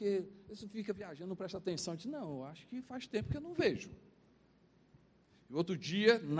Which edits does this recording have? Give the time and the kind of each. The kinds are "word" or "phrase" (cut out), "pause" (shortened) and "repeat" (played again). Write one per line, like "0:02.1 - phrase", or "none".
none